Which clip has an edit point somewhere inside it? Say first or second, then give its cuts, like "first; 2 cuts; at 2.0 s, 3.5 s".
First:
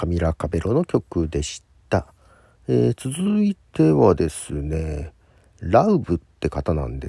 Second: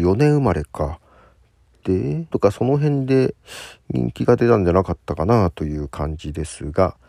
second; 1 cut; at 2.3 s